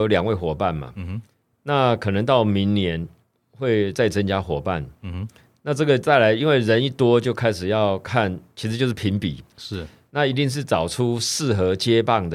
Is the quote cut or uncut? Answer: uncut